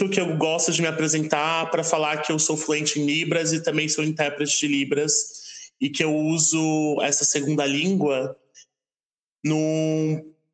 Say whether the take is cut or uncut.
uncut